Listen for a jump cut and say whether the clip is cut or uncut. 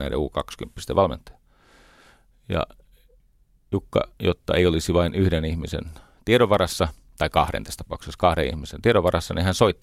uncut